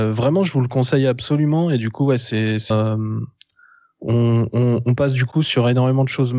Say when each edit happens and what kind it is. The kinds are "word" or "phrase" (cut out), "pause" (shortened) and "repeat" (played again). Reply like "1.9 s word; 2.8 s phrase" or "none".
2.7 s word

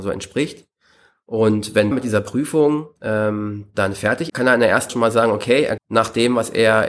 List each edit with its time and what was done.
1.9 s word; 3.0 s pause; 4.3 s word; 4.9 s word; 5.8 s word

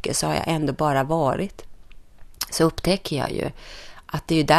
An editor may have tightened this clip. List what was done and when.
none

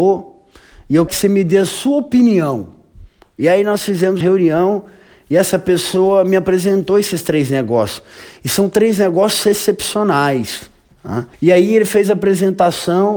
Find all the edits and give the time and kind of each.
1.1 s word; 4.2 s word; 11.3 s pause

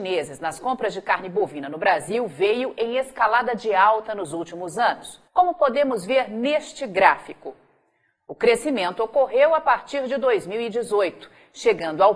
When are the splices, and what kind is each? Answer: 5.3 s pause

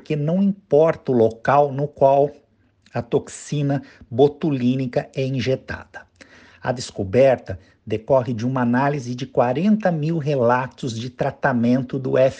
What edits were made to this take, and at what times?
none

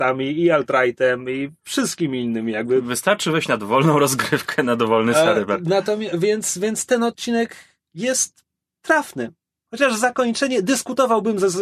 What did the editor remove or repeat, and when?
none

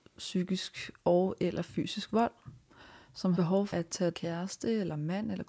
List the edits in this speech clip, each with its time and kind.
3.3 s word; 3.7 s word; 4.1 s word

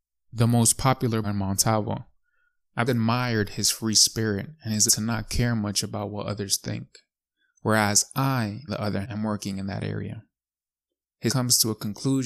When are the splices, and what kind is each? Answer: 1.2 s word; 2.9 s word; 4.9 s word; 8.7 s word; 9.0 s word; 11.3 s word

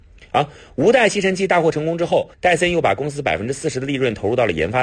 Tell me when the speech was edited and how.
2.3 s pause

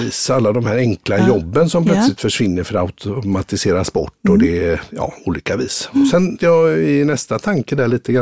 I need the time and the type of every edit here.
6.4 s word

